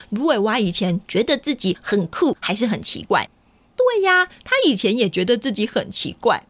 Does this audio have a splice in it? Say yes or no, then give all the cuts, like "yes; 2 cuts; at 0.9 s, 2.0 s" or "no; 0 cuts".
no; 0 cuts